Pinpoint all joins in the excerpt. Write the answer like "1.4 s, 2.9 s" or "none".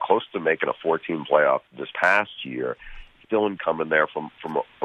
1.7 s, 3.2 s, 3.6 s